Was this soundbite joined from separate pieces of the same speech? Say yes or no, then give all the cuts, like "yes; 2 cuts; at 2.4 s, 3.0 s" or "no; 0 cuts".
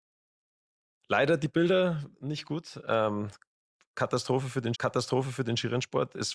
yes; 2 cuts; at 2.1 s, 4.7 s